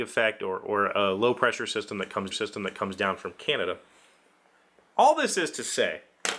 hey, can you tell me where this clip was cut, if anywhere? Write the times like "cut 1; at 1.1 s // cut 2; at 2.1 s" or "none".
cut 1; at 2.3 s